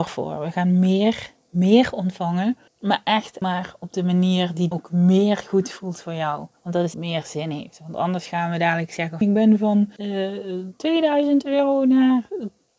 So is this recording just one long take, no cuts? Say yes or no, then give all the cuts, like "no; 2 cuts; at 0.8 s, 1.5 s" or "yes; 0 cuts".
no; 7 cuts; at 2.7 s, 3.4 s, 4.7 s, 6.6 s, 6.9 s, 9.2 s, 10.0 s